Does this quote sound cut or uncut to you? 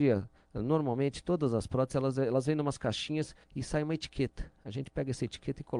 cut